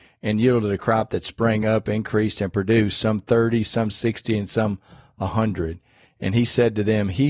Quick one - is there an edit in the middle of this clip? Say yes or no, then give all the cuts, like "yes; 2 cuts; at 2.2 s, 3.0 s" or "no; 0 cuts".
no; 0 cuts